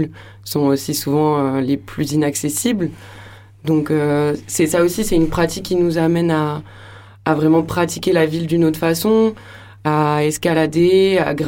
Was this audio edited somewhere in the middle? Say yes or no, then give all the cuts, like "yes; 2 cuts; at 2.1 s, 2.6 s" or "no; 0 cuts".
no; 0 cuts